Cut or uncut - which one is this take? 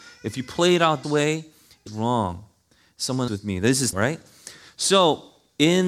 cut